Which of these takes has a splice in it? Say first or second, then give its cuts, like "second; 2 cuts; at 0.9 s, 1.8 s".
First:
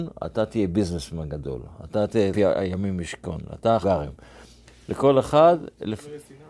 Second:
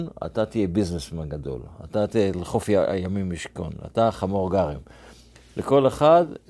first; 2 cuts; at 2.3 s, 3.8 s